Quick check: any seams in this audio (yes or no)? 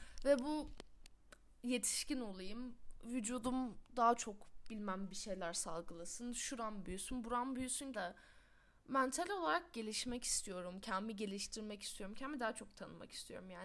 yes